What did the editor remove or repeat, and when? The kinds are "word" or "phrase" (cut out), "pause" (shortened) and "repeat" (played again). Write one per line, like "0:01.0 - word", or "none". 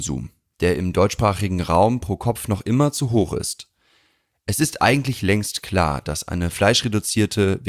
none